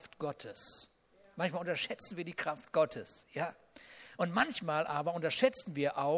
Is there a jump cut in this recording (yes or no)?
no